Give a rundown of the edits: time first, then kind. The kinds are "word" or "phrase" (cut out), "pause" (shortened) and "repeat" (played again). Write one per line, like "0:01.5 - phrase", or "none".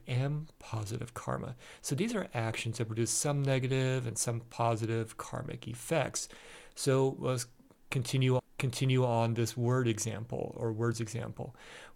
0:07.2 - word
0:08.4 - repeat